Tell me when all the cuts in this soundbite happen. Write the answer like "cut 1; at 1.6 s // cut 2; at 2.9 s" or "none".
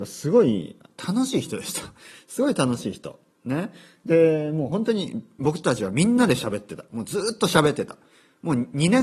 none

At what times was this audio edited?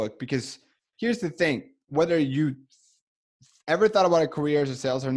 none

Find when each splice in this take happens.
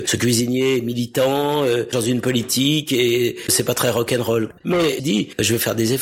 cut 1; at 1.9 s // cut 2; at 3.5 s // cut 3; at 5.0 s

